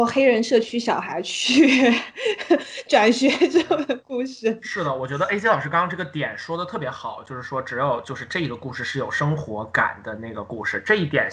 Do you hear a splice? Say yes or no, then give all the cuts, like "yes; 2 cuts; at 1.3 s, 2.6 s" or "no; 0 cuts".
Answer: no; 0 cuts